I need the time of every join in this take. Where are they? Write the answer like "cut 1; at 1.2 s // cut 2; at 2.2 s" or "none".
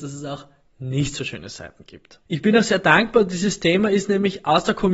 cut 1; at 2.2 s